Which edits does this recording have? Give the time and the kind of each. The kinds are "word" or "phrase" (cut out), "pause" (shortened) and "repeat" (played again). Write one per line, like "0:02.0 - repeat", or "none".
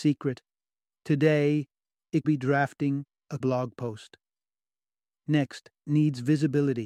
0:02.2 - word
0:03.4 - word
0:05.8 - word